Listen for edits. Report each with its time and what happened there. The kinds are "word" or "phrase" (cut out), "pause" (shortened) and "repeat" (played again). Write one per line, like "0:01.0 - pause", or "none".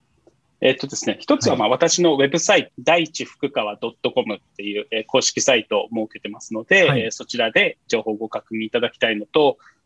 0:02.7 - phrase